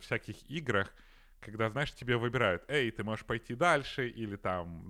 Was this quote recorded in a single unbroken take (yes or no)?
yes